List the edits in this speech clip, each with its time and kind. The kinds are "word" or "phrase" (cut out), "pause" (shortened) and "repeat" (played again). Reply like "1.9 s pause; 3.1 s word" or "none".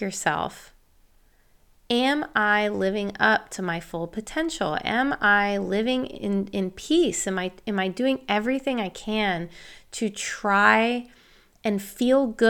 none